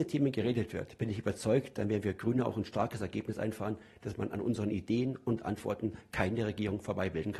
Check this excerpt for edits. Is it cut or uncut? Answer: uncut